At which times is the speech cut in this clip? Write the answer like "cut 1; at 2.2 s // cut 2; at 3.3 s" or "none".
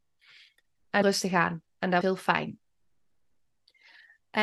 cut 1; at 1.0 s // cut 2; at 2.0 s